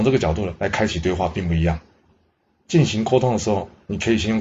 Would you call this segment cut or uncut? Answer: uncut